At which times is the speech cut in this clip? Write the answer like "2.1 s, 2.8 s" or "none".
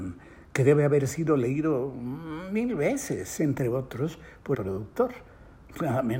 4.5 s